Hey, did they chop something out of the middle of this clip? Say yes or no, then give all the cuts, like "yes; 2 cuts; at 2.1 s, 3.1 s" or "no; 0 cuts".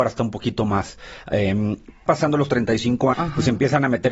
yes; 2 cuts; at 2.1 s, 3.1 s